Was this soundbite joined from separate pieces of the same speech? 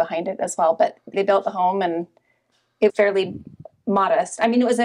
yes; 2 cuts; at 1.1 s, 2.9 s

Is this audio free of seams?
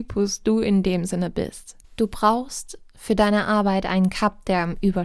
no; 1 cut; at 1.8 s

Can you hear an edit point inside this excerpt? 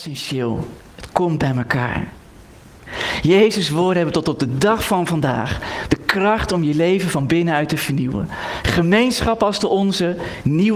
no; 0 cuts

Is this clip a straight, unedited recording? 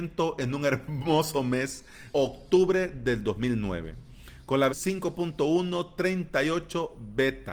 no; 2 cuts; at 2.1 s, 4.7 s

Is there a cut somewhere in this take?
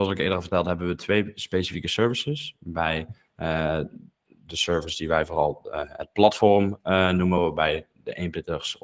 no; 0 cuts

